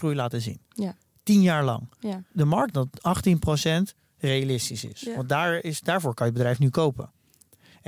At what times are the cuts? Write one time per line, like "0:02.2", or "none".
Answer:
0:02.7